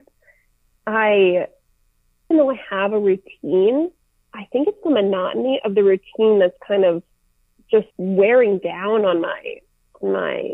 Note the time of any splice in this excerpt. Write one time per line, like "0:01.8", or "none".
0:02.3
0:07.9

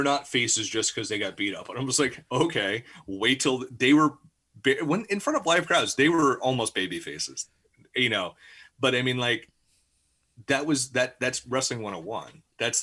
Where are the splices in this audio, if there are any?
none

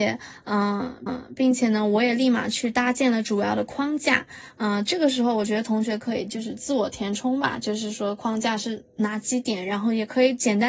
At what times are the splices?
0:01.1

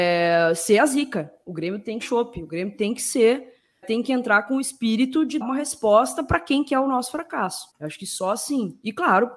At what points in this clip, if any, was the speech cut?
0:02.0
0:03.8
0:05.4
0:07.7

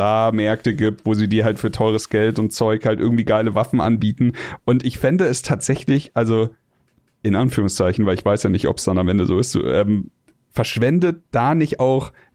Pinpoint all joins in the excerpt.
none

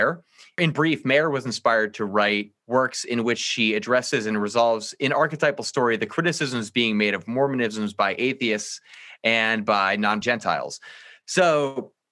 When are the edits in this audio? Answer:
0:10.2

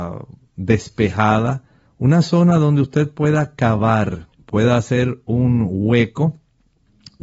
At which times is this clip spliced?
0:01.9
0:04.3

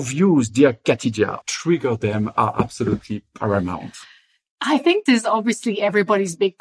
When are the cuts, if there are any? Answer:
0:01.4
0:05.1

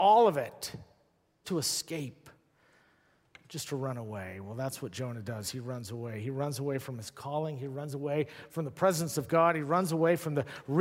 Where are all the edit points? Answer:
0:01.4

